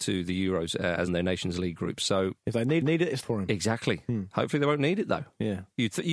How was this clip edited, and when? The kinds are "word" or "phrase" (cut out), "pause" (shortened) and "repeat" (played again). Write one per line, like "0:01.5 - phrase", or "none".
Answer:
0:01.1 - phrase
0:02.4 - pause
0:02.8 - repeat
0:03.2 - word

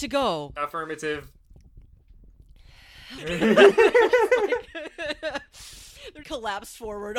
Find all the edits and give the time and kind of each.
0:03.2 - word
0:06.2 - phrase

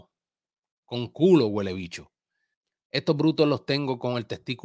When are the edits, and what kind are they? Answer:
0:02.5 - pause

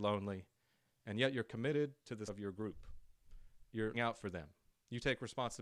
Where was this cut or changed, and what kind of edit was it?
0:02.3 - word
0:03.9 - word

